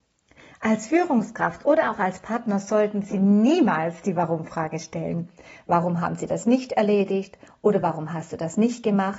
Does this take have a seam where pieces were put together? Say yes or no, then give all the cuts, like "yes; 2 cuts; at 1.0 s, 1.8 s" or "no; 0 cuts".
no; 0 cuts